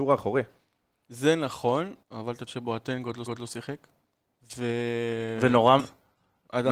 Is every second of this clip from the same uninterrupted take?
no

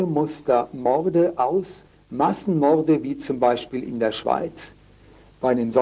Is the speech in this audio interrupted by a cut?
no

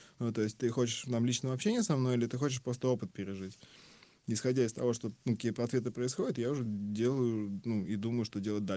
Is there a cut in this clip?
no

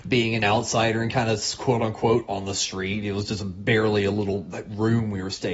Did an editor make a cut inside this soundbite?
no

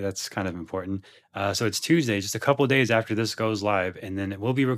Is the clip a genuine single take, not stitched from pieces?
yes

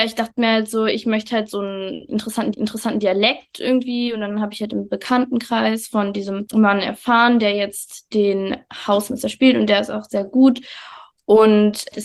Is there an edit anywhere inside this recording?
yes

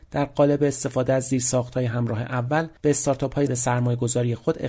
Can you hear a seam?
yes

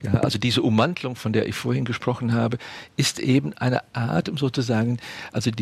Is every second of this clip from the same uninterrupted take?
yes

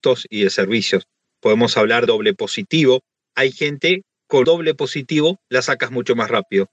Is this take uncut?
no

